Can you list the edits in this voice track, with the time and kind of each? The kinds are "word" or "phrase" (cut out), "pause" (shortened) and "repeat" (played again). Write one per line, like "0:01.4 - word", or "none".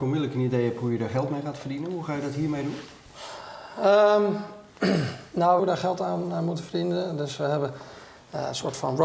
0:05.6 - phrase